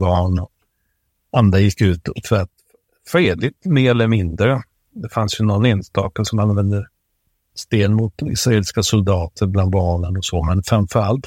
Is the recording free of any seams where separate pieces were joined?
yes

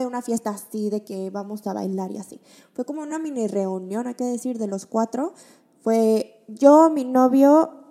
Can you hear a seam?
no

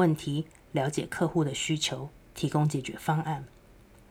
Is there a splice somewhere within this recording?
no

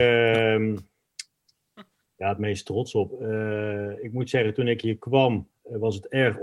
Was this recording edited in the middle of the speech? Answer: no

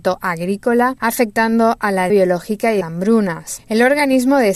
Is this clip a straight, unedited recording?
no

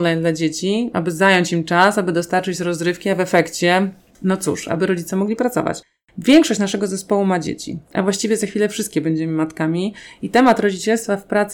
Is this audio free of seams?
yes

